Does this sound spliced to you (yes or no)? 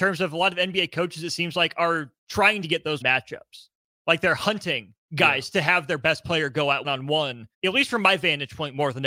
yes